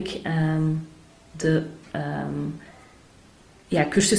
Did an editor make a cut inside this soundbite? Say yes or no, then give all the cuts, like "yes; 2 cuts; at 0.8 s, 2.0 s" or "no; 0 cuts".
no; 0 cuts